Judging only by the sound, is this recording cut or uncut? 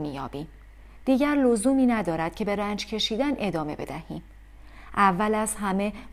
uncut